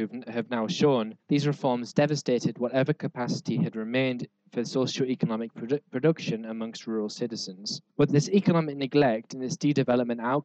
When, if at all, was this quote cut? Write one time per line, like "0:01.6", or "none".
0:01.2
0:07.9